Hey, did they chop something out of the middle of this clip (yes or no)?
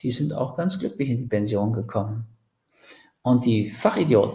no